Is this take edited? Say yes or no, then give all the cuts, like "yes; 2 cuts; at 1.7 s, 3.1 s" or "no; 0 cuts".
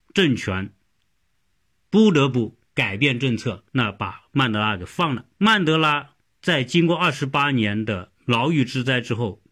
yes; 5 cuts; at 2.7 s, 3.7 s, 5.3 s, 6.2 s, 8.2 s